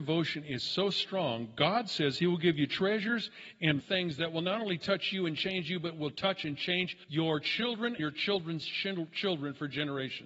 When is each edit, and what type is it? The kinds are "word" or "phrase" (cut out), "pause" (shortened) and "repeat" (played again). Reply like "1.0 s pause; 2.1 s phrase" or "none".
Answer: 3.8 s word; 7.0 s pause; 8.0 s word